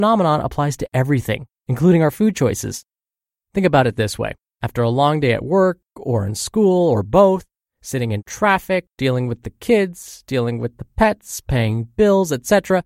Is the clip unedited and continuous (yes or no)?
yes